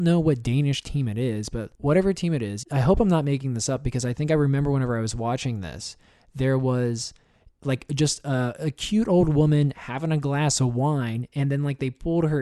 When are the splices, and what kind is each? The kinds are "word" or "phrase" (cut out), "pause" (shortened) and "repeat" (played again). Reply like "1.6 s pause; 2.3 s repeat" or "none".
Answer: none